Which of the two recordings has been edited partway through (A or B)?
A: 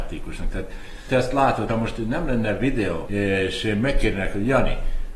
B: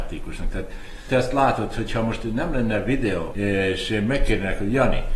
A